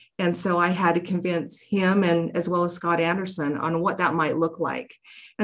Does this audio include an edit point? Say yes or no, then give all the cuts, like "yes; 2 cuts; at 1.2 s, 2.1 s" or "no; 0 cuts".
no; 0 cuts